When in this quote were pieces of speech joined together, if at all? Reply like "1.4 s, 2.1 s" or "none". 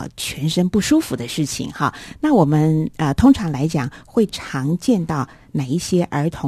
none